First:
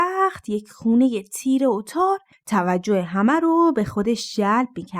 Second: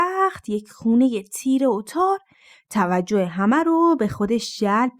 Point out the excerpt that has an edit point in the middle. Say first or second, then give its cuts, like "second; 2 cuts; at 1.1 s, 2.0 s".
first; 1 cut; at 2.3 s